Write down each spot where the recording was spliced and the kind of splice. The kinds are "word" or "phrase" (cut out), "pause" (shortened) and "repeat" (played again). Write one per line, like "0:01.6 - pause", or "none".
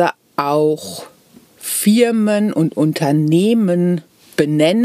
none